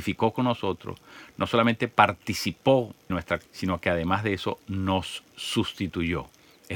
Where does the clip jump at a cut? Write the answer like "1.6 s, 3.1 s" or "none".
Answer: 3.1 s, 3.4 s

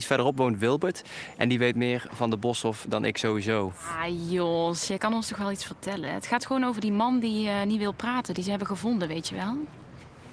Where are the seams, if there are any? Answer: none

